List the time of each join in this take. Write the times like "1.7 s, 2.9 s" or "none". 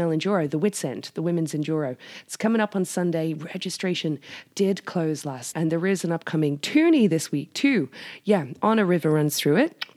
5.5 s